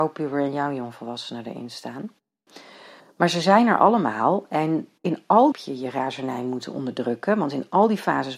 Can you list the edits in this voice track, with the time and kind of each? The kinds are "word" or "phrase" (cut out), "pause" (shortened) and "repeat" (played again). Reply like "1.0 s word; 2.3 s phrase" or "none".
5.5 s phrase

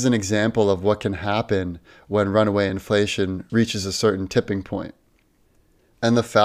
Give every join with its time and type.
none

